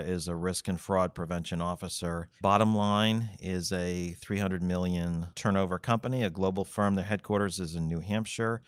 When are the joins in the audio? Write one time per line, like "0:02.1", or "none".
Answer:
0:02.4

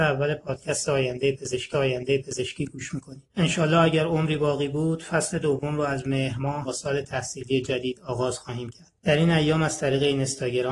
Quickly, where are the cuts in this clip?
0:01.7
0:03.3
0:06.6
0:09.0

